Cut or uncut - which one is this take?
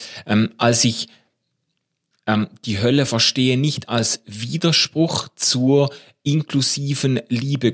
uncut